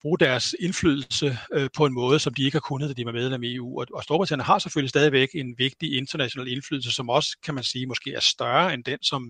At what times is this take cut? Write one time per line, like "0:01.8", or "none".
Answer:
none